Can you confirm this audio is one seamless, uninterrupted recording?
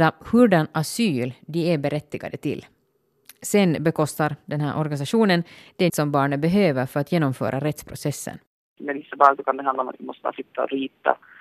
no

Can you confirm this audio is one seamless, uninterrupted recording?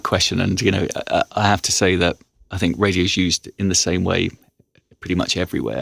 yes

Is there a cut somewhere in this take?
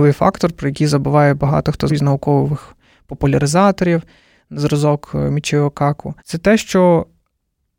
yes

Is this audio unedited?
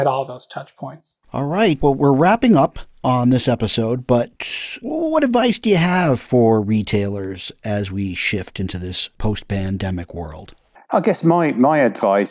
no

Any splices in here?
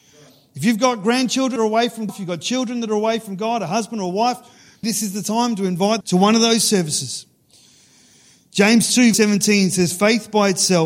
yes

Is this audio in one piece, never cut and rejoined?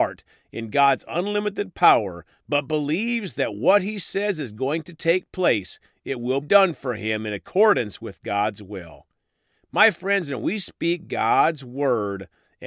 no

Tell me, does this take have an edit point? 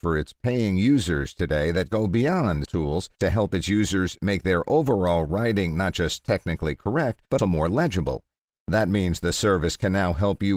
yes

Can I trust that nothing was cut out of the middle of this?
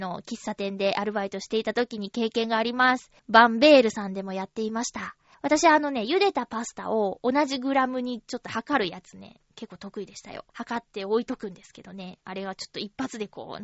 no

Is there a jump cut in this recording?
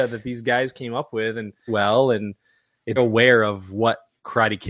yes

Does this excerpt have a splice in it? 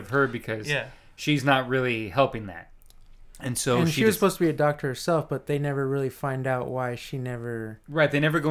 no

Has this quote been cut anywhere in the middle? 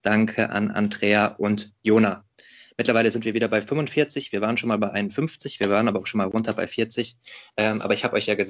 no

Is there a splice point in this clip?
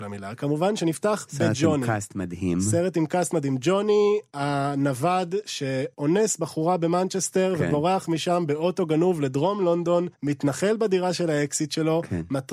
yes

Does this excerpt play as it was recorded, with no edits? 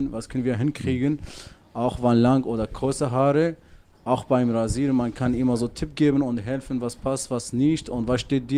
yes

